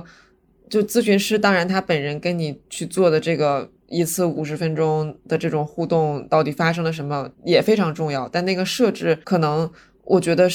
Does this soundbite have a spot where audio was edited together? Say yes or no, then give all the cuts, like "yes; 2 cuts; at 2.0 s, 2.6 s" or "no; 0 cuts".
yes; 2 cuts; at 7.3 s, 9.2 s